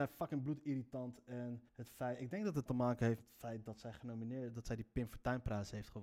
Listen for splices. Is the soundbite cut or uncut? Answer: cut